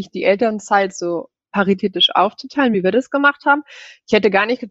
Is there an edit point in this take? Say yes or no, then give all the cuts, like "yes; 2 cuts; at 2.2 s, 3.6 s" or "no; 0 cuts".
no; 0 cuts